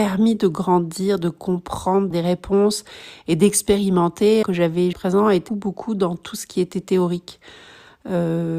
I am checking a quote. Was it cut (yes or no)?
yes